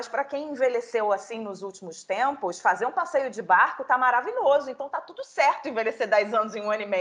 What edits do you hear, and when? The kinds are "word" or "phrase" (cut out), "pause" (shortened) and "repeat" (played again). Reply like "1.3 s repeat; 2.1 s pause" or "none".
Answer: none